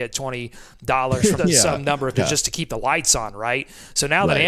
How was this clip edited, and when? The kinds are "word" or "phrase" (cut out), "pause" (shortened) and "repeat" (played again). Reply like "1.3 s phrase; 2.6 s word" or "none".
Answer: 1.4 s word; 2.1 s phrase